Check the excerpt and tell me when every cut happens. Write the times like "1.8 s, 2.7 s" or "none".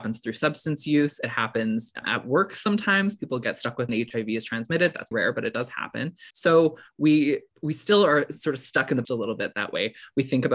2.0 s, 3.9 s, 5.1 s, 6.3 s, 7.5 s, 9.0 s